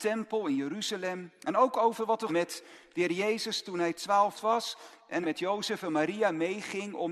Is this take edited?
yes; 3 cuts; at 2.3 s, 4.3 s, 5.2 s

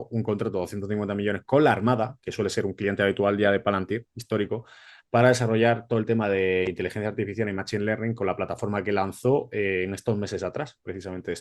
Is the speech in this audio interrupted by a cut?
no; 0 cuts

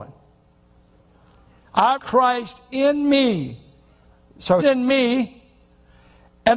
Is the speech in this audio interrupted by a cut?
yes; 2 cuts; at 2.0 s, 4.6 s

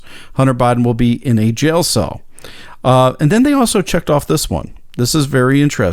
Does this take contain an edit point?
no; 0 cuts

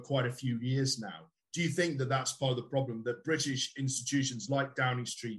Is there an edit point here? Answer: no; 0 cuts

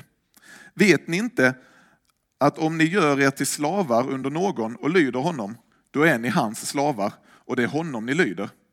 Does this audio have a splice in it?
no; 0 cuts

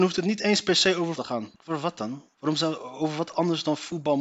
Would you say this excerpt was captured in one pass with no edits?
no; 3 cuts; at 1.2 s, 1.6 s, 2.3 s

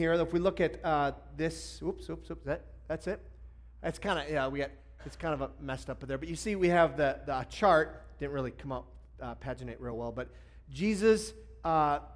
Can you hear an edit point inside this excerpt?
no; 0 cuts

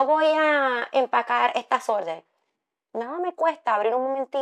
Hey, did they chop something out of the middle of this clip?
no; 0 cuts

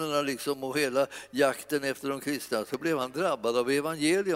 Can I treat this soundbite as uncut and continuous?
yes; 0 cuts

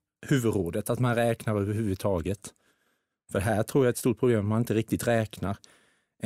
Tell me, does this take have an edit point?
no; 0 cuts

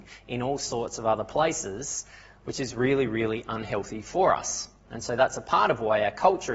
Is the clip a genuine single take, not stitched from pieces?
yes; 0 cuts

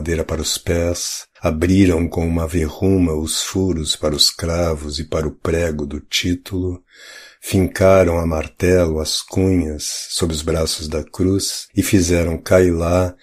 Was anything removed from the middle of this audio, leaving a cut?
yes; 2 cuts; at 1.4 s, 11.7 s

